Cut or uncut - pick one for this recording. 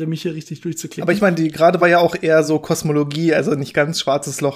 uncut